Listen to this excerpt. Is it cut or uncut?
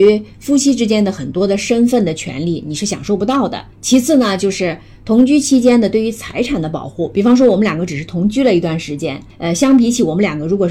cut